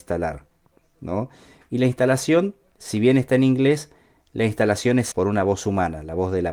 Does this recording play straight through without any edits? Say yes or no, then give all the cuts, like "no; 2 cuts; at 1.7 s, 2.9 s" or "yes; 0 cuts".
no; 1 cut; at 5.1 s